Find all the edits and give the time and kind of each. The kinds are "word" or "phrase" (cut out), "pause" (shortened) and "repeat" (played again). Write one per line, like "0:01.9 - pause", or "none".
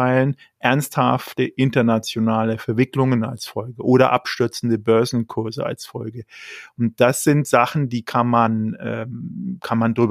none